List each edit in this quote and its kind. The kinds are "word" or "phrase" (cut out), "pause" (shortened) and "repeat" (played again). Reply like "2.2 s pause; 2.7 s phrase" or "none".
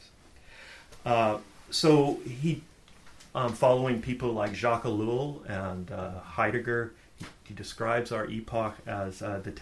1.6 s pause; 3.3 s phrase